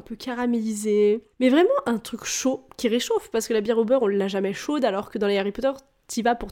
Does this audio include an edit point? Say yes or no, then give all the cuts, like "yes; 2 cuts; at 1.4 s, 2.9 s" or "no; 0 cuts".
no; 0 cuts